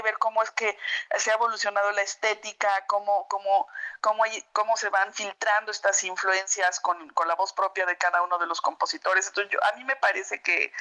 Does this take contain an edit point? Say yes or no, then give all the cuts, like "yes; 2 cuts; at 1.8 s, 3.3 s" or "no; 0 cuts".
no; 0 cuts